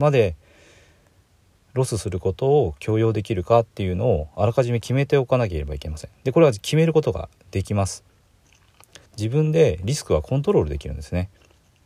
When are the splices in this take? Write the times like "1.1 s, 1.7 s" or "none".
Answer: 9.1 s

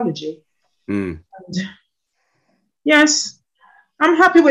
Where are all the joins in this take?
none

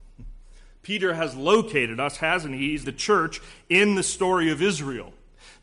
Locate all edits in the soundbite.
2.8 s

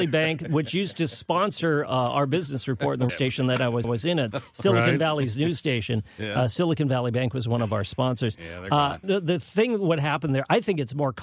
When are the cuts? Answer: 3.1 s, 3.8 s, 9.0 s

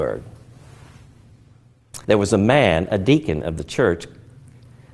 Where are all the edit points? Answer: 2.0 s

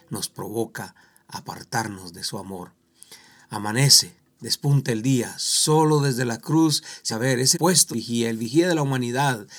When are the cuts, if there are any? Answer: 7.1 s, 7.5 s, 7.9 s

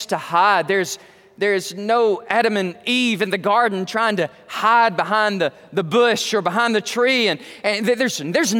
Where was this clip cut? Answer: none

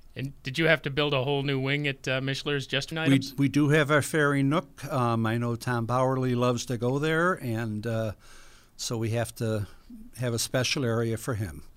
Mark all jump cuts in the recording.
2.9 s

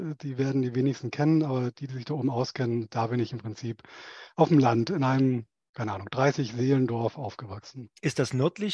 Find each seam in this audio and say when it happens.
none

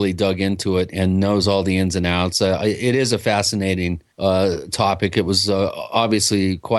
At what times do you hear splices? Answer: 0.9 s, 4.1 s

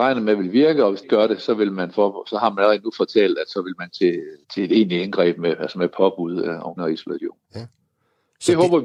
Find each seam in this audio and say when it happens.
1.0 s, 3.9 s, 4.4 s, 6.8 s, 7.4 s

